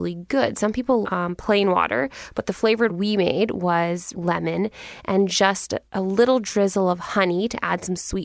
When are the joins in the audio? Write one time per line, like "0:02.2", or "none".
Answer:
0:01.0
0:02.9
0:04.1
0:05.8